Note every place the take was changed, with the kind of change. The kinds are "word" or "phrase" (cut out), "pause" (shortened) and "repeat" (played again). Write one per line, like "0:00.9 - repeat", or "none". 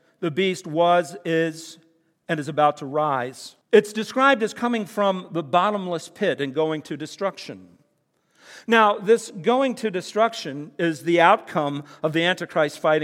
0:03.6 - pause